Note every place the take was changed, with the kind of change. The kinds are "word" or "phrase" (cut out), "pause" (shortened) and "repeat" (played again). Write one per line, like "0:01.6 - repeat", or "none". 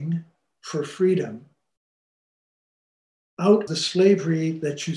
0:03.7 - word